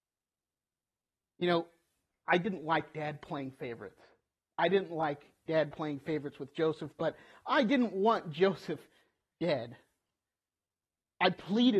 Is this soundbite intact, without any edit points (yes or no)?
yes